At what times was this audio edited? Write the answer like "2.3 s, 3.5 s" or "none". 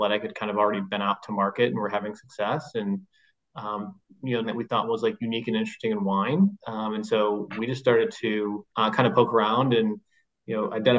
4.0 s, 4.4 s, 8.7 s

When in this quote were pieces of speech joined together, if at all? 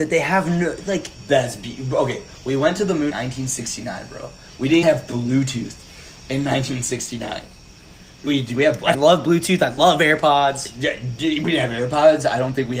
3.1 s, 4.8 s, 8.3 s, 8.9 s

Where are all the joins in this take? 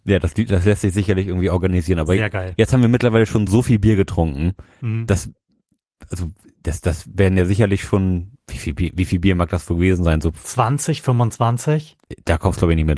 none

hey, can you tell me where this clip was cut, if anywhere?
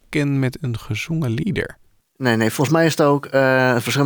none

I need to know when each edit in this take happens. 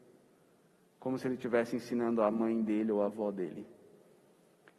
none

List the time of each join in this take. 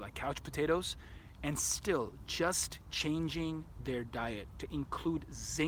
none

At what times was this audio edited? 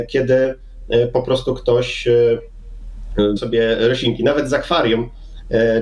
3.4 s

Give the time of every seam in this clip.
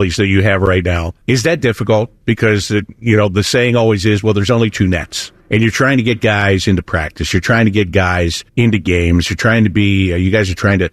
1.2 s, 5.4 s, 8.5 s

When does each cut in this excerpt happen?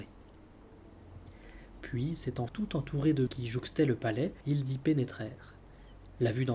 2.5 s, 3.3 s, 4.4 s

